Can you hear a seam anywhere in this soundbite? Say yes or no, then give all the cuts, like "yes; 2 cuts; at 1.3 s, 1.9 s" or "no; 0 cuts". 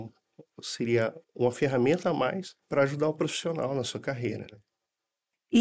yes; 2 cuts; at 1.2 s, 2.6 s